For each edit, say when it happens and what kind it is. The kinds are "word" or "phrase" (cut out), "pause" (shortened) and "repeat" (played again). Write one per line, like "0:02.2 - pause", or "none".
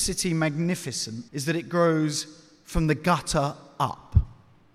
0:01.3 - pause